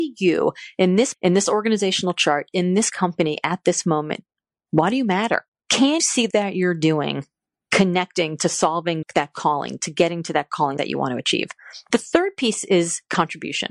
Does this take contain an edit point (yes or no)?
yes